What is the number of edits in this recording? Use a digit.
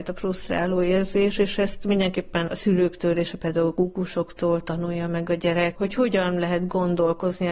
2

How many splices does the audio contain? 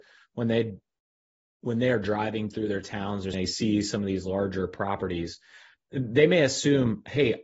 1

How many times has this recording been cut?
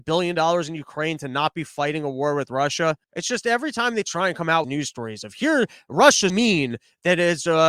3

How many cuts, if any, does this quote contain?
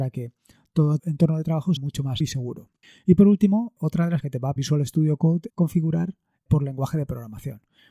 8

